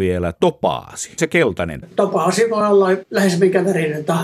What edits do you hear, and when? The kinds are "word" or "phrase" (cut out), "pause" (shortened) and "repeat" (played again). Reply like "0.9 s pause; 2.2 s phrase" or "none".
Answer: none